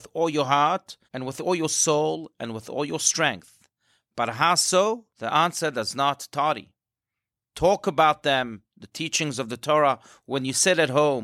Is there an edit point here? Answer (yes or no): yes